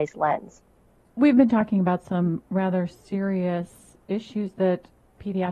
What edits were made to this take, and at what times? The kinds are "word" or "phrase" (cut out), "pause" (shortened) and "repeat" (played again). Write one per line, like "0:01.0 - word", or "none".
none